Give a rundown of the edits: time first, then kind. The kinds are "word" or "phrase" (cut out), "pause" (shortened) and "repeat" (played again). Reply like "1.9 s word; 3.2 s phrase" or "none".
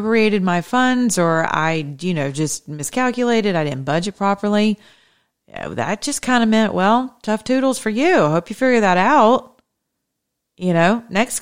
none